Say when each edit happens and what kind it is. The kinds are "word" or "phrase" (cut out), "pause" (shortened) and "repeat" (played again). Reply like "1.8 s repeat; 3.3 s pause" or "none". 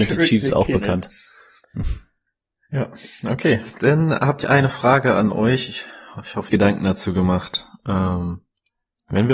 2.3 s pause; 4.4 s word; 6.5 s phrase

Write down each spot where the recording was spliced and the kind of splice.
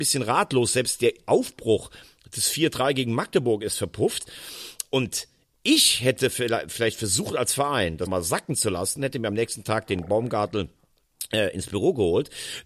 8.1 s word

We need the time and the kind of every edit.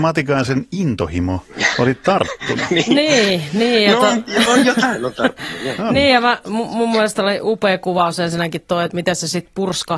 none

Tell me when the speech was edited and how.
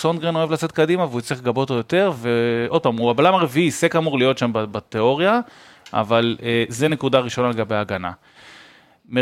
none

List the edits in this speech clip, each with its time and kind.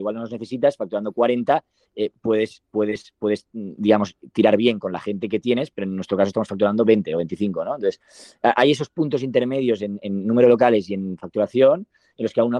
none

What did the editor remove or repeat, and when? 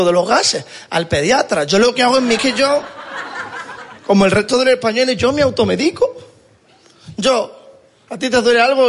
2.4 s phrase; 4.0 s pause

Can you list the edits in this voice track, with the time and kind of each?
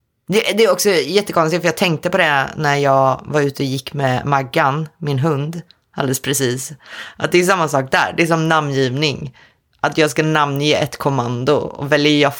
none

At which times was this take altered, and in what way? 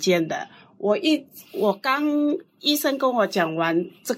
1.5 s pause

